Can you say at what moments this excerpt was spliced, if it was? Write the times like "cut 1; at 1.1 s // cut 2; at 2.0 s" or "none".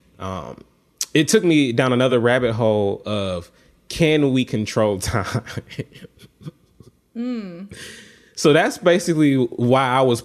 none